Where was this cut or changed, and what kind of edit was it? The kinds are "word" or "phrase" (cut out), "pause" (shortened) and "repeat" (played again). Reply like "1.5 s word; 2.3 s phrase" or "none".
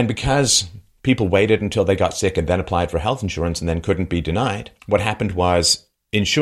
4.8 s pause